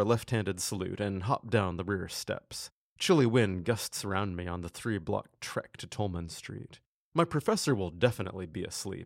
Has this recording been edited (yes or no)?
no